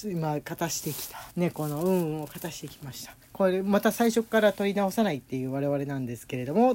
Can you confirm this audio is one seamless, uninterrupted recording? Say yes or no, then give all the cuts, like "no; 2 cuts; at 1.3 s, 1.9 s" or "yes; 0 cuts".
no; 2 cuts; at 1.3 s, 3.2 s